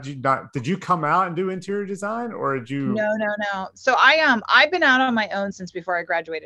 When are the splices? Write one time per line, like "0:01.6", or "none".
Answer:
none